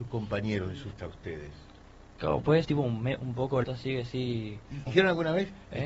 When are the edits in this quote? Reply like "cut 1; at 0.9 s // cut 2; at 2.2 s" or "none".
cut 1; at 1.0 s // cut 2; at 2.6 s // cut 3; at 3.6 s // cut 4; at 4.9 s